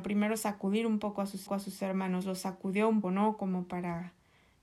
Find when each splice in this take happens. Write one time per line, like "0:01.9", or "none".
0:01.5
0:03.0

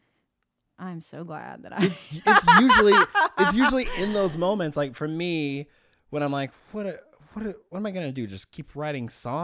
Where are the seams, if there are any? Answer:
none

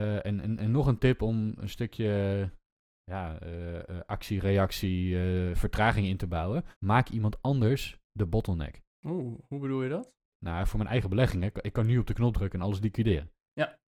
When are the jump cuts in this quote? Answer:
0:06.8

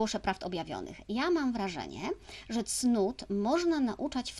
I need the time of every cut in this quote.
none

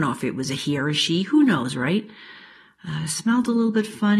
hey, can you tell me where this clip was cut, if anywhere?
none

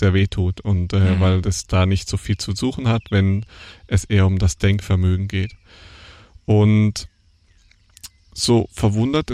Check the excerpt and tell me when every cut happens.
none

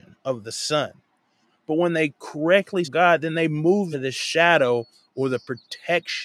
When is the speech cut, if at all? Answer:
0:02.8
0:03.9

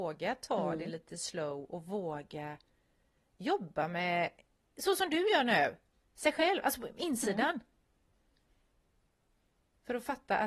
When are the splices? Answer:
none

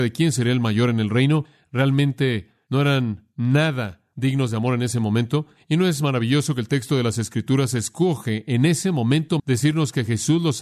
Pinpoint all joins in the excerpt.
0:09.4

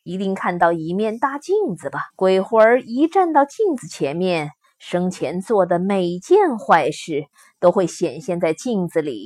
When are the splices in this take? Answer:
0:02.1

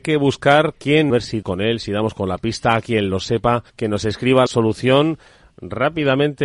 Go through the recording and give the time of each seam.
0:01.1
0:01.4
0:03.7
0:04.5

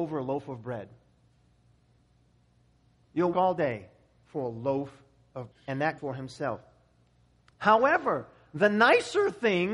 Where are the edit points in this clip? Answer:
0:03.3
0:05.5
0:06.0

